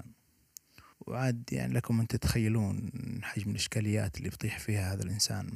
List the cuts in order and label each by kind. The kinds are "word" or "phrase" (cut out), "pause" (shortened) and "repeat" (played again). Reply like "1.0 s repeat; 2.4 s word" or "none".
0.9 s pause